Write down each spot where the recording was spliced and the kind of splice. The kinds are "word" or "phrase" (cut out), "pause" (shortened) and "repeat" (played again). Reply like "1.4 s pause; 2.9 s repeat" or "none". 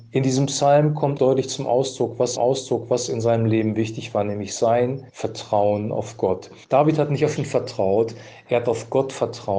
1.2 s word; 2.4 s repeat; 5.1 s pause; 6.6 s pause; 7.4 s word